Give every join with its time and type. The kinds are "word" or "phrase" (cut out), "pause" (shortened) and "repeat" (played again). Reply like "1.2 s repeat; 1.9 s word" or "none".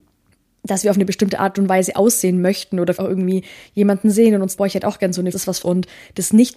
3.0 s word; 4.6 s word; 5.3 s phrase; 5.6 s phrase